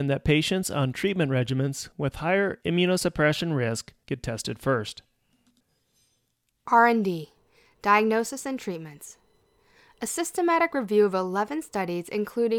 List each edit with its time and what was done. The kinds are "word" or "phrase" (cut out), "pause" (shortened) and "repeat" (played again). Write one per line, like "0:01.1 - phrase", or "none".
none